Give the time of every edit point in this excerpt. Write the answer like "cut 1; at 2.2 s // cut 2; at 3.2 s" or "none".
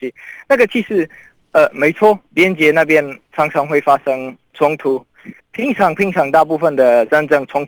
cut 1; at 2.3 s // cut 2; at 5.4 s